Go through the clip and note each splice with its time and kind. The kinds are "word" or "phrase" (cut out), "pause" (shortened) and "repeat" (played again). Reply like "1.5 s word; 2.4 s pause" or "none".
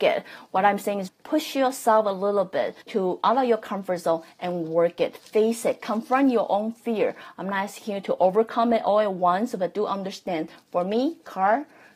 1.1 s word; 2.8 s pause